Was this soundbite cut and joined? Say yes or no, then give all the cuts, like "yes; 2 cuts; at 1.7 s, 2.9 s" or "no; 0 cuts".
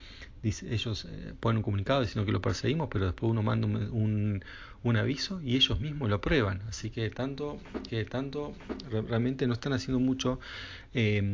yes; 1 cut; at 7.9 s